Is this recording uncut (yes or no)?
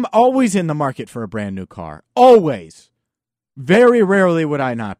yes